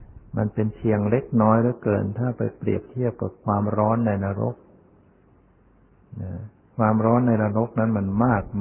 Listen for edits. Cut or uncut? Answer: uncut